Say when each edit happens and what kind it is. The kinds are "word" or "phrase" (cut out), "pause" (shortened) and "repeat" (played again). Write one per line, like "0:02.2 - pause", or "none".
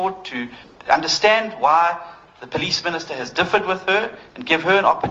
none